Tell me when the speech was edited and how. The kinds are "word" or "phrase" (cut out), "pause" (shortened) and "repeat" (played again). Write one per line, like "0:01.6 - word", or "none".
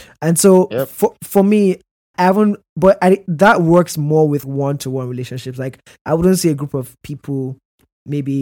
0:02.1 - word
0:04.4 - word
0:07.0 - word